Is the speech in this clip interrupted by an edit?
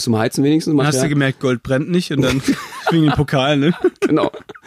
no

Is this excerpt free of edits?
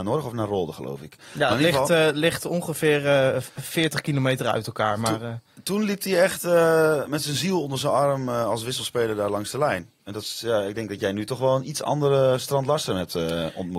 no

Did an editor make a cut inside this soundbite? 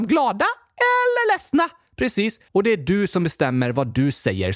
yes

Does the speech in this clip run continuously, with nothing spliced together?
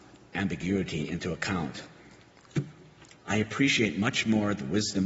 no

